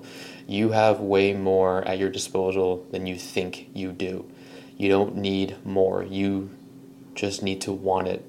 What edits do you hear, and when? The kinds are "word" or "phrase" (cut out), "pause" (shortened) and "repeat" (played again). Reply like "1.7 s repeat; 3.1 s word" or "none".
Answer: none